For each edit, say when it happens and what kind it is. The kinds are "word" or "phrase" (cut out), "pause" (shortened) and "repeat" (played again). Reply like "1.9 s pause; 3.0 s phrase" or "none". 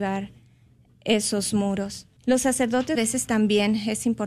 2.2 s pause; 3.0 s word